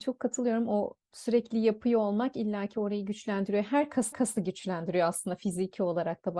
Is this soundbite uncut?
no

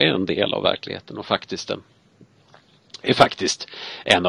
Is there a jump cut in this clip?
no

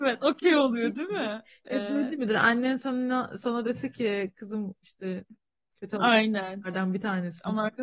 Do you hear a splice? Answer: no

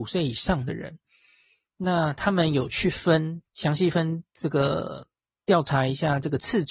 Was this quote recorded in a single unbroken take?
no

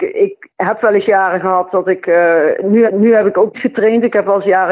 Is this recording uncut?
no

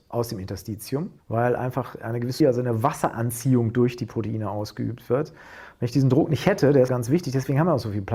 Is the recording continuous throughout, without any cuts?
no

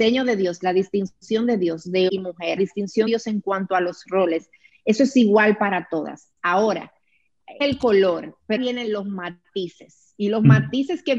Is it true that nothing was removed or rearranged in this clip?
no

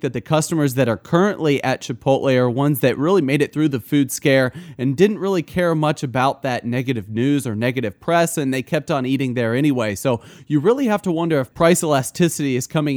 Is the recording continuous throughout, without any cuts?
yes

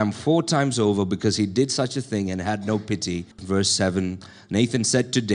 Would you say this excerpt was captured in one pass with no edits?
no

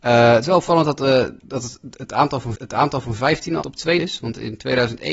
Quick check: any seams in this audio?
yes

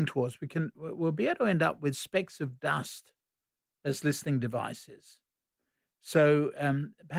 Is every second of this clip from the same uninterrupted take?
yes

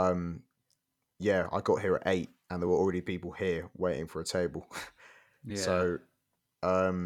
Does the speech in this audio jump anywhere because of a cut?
no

